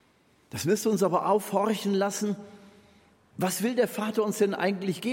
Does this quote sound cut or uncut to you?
uncut